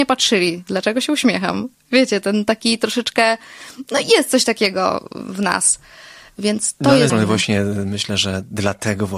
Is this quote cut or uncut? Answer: cut